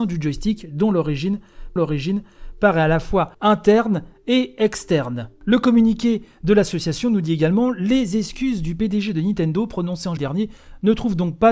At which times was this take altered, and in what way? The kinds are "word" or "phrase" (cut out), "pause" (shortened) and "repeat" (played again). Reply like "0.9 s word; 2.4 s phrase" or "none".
1.8 s repeat; 3.3 s pause; 10.2 s word